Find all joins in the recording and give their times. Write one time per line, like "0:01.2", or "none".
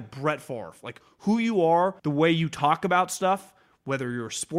0:02.0